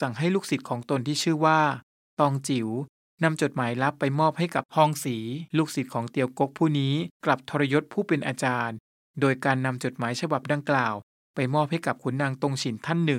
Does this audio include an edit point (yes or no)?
yes